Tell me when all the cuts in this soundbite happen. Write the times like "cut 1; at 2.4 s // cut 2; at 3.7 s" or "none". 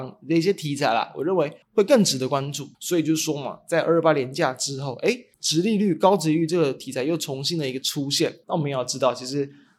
cut 1; at 1.6 s // cut 2; at 2.7 s // cut 3; at 5.3 s // cut 4; at 8.4 s